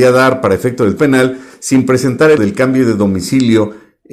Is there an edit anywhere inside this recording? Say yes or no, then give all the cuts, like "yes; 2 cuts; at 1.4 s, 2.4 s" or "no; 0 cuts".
yes; 2 cuts; at 1.0 s, 2.4 s